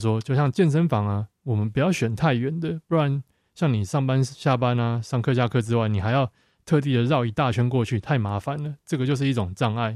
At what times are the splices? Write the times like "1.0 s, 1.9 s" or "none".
none

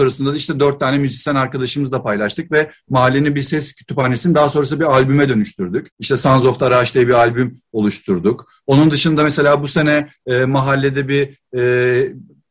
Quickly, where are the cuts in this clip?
5.9 s

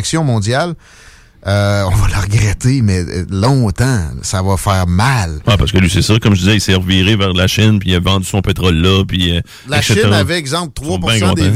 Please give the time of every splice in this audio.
none

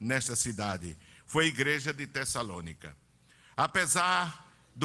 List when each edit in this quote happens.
none

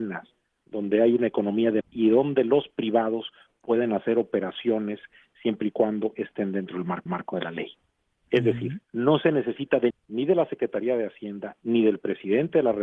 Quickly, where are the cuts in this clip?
1.8 s, 7.1 s, 8.8 s, 9.9 s

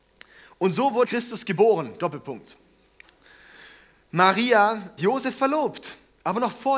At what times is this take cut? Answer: 1.0 s, 5.0 s

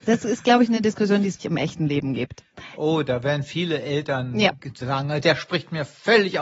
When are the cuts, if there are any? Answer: 1.4 s

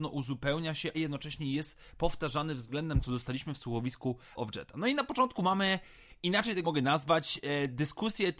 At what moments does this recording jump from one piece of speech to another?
0.9 s, 3.0 s, 4.4 s, 6.6 s

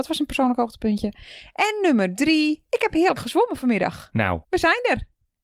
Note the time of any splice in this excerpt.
4.4 s

